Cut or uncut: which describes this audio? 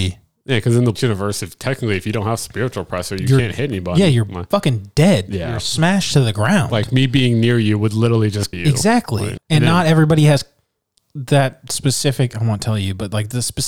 cut